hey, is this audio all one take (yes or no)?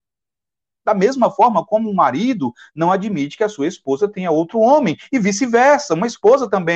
yes